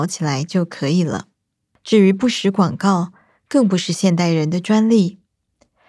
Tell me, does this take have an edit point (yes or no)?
no